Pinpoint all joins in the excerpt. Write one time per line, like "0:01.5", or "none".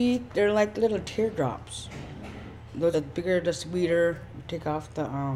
0:02.9